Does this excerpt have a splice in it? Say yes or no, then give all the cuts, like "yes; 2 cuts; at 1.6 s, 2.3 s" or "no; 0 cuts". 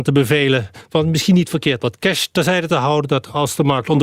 no; 0 cuts